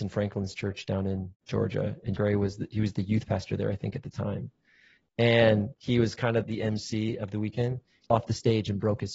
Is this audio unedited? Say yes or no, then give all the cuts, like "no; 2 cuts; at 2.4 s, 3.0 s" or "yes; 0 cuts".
no; 5 cuts; at 1.3 s, 2.2 s, 5.7 s, 6.4 s, 8.1 s